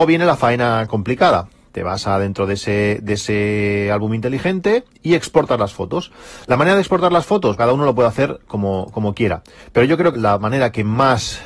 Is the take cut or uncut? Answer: cut